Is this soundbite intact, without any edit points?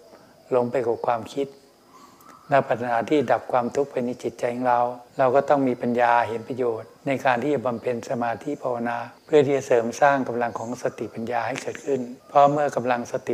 no; 4 cuts; at 5.1 s, 7.0 s, 9.2 s, 12.2 s

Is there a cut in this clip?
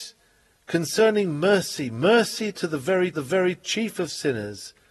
yes; 1 cut; at 3.1 s

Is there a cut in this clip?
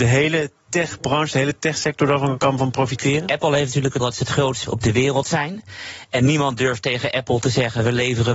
yes; 3 cuts; at 2.4 s, 4.0 s, 4.6 s

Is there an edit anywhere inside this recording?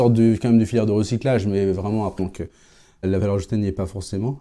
yes; 1 cut; at 2.2 s

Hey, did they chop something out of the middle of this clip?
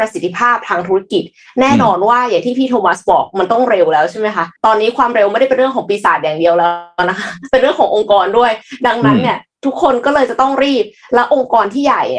yes; 1 cut; at 4.6 s

